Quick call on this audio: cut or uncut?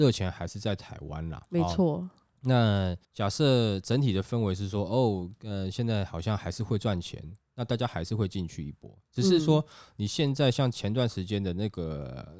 cut